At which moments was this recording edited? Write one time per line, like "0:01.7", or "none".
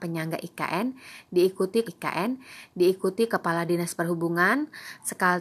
0:01.8

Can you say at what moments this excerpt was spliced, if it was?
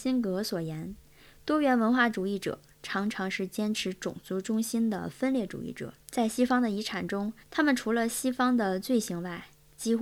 0:06.0
0:07.4

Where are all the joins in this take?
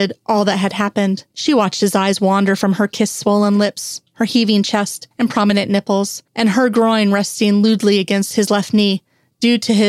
0:01.3
0:05.1
0:06.3

